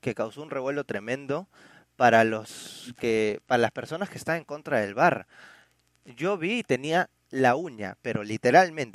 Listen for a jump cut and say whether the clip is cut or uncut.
uncut